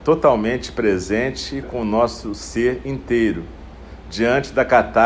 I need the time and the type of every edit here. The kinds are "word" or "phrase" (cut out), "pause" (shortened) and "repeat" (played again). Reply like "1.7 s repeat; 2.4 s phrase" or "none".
1.6 s word